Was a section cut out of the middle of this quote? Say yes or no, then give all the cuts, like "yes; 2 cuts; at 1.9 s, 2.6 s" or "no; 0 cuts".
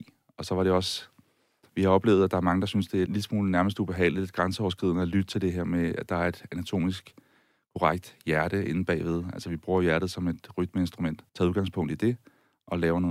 yes; 2 cuts; at 3.1 s, 11.3 s